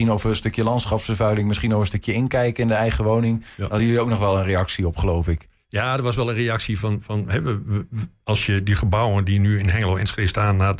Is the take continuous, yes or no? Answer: yes